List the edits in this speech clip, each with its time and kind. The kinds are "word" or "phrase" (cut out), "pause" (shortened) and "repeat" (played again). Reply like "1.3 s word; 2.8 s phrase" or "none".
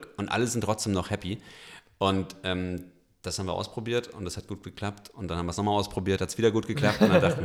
none